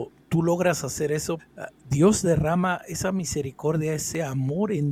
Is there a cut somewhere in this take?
yes; 1 cut; at 1.4 s

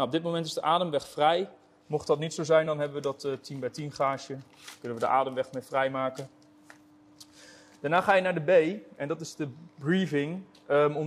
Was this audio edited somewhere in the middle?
no; 0 cuts

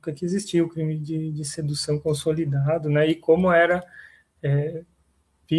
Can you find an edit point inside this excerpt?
no; 0 cuts

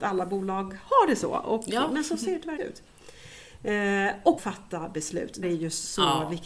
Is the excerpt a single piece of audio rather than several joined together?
no; 3 cuts; at 2.6 s, 4.4 s, 5.4 s

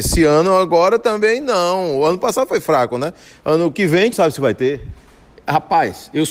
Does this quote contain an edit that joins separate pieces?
yes; 1 cut; at 4.1 s

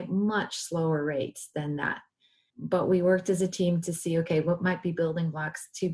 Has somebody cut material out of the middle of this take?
yes; 1 cut; at 2.5 s

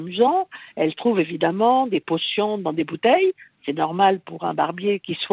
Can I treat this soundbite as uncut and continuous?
yes; 0 cuts

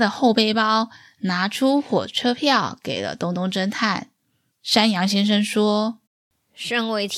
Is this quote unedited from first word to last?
no; 1 cut; at 6.1 s

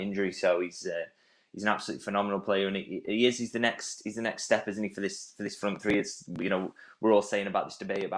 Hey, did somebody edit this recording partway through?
no; 0 cuts

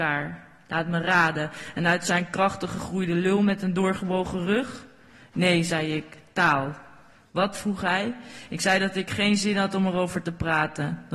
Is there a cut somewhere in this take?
no; 0 cuts

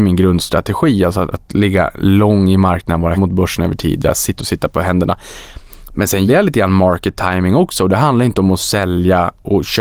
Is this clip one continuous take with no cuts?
no; 4 cuts; at 1.3 s, 3.2 s, 4.4 s, 6.3 s

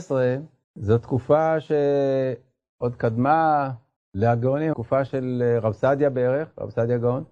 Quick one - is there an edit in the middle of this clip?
yes; 1 cut; at 4.7 s

